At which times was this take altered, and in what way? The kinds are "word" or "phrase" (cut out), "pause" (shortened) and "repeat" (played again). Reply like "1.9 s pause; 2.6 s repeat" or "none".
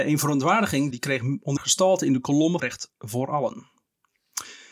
0.9 s word; 1.6 s word; 2.6 s word